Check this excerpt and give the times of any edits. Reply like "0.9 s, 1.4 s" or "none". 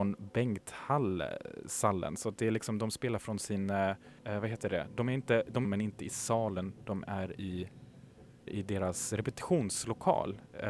4.2 s, 5.6 s, 8.5 s